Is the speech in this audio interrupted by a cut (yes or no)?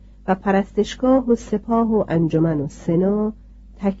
no